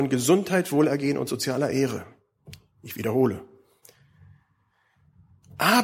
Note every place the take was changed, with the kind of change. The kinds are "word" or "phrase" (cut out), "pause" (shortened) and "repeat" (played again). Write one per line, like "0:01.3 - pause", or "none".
none